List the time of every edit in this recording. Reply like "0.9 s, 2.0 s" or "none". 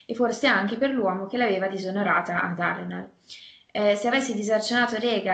none